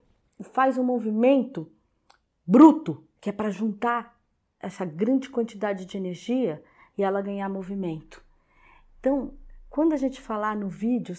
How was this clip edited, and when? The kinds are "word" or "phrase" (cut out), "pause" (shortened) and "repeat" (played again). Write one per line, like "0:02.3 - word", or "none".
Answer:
0:03.2 - pause